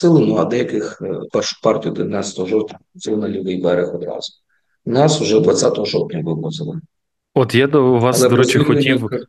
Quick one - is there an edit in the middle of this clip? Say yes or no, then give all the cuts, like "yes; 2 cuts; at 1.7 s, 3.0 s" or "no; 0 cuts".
yes; 1 cut; at 1.3 s